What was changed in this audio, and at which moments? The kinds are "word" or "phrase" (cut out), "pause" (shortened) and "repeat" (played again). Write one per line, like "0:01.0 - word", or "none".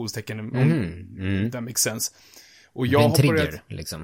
none